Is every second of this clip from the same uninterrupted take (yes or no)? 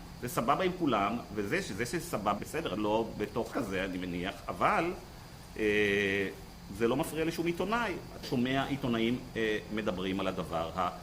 no